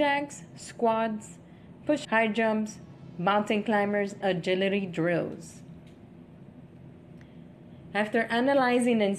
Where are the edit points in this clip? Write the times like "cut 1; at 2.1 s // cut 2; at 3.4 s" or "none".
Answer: cut 1; at 2.0 s // cut 2; at 4.2 s